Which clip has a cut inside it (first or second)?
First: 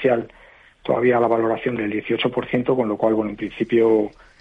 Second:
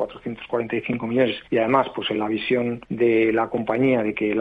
second